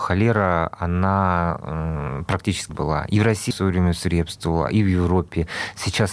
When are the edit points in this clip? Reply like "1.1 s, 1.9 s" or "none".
2.7 s, 3.5 s